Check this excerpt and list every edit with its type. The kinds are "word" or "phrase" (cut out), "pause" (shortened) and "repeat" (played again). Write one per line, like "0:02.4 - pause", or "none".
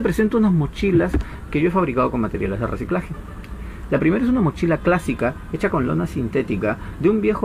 none